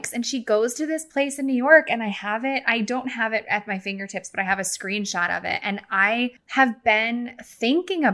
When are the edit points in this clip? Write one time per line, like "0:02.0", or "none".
none

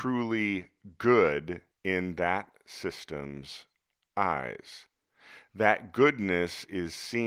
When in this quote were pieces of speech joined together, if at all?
0:01.7

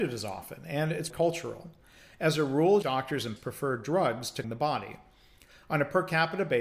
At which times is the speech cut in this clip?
0:01.1
0:02.8
0:03.4
0:04.4

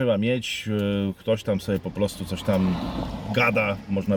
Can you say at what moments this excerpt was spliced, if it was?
none

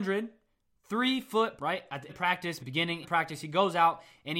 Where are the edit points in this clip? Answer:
0:01.6
0:02.1
0:02.6
0:03.0

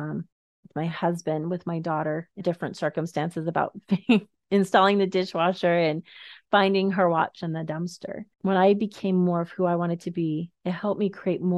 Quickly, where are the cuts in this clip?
0:02.4
0:08.3
0:10.5

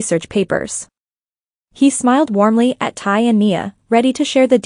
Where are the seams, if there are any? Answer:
none

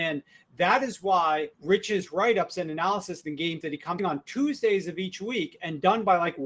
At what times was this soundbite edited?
0:01.5
0:03.6
0:04.0

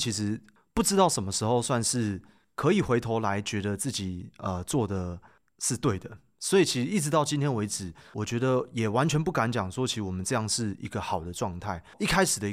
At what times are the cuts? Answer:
none

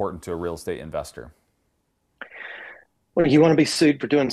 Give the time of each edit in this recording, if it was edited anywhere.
none

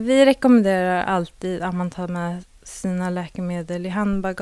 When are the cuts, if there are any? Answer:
none

